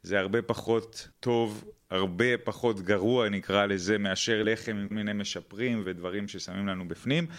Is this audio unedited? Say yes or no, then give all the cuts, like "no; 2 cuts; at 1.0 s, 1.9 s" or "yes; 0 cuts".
no; 4 cuts; at 1.1 s, 4.4 s, 4.9 s, 5.8 s